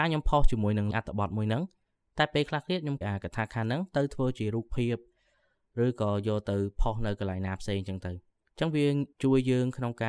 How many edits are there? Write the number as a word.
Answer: four